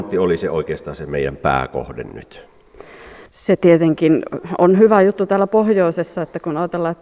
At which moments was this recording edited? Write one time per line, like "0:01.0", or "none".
0:03.3